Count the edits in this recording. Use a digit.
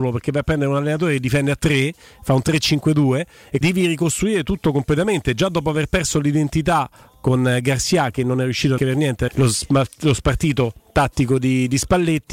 3